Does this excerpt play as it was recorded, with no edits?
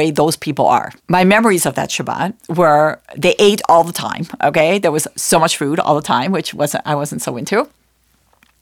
no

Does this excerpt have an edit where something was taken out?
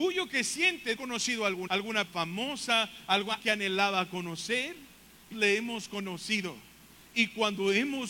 yes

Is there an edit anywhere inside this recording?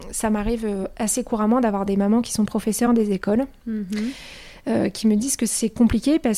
no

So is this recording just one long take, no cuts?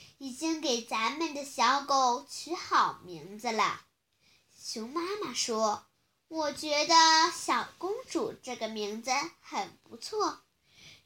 no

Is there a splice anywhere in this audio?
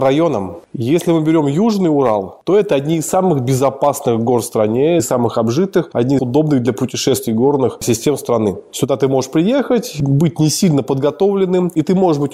yes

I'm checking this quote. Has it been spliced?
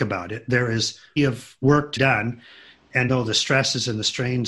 yes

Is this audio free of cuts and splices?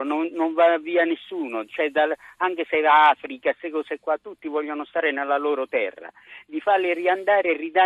yes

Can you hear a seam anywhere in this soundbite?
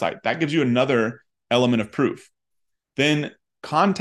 no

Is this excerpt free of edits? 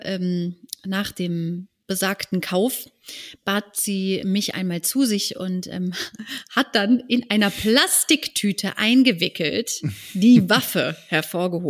yes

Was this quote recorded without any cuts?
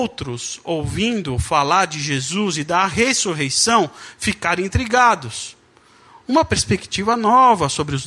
yes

